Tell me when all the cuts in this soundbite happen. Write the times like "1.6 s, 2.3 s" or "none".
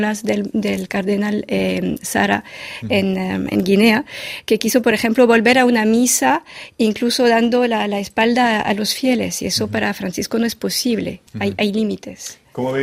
11.3 s

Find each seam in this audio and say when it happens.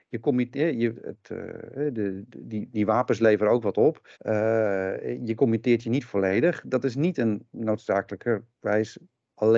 1.0 s, 4.1 s

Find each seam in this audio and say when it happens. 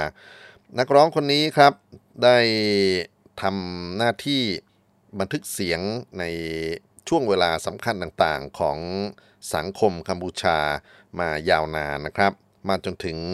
none

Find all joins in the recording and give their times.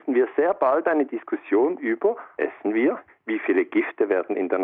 2.4 s, 3.1 s

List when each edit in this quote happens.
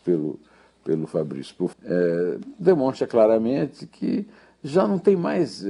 1.7 s

